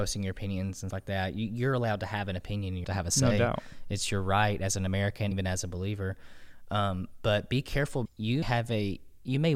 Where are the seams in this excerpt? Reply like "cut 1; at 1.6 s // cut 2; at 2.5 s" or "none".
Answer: cut 1; at 0.9 s // cut 2; at 2.8 s // cut 3; at 5.3 s // cut 4; at 8.1 s // cut 5; at 8.4 s

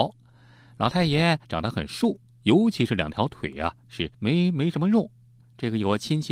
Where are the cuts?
cut 1; at 1.4 s // cut 2; at 4.1 s

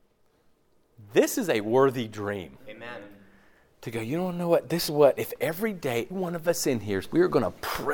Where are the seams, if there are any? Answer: cut 1; at 4.9 s // cut 2; at 6.1 s // cut 3; at 7.0 s

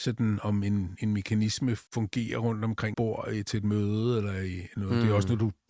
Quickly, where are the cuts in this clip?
cut 1; at 1.9 s // cut 2; at 2.9 s

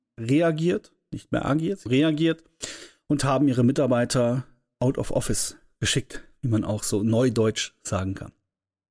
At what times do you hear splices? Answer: cut 1; at 1.9 s

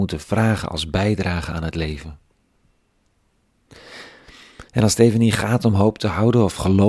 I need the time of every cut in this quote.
cut 1; at 4.7 s

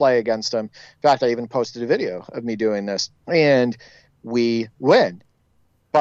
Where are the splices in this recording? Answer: cut 1; at 3.2 s // cut 2; at 4.7 s

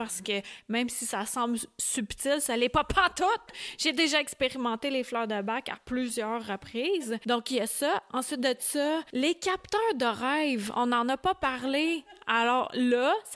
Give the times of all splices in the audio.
none

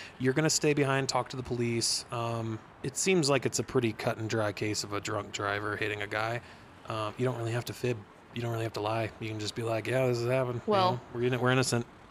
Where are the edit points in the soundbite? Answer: none

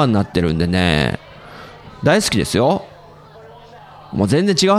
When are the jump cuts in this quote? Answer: none

